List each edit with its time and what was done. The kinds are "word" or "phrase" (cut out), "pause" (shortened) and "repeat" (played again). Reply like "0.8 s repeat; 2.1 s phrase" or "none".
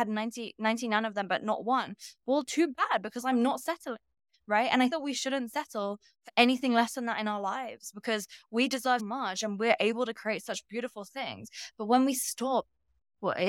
4.9 s word; 9.0 s word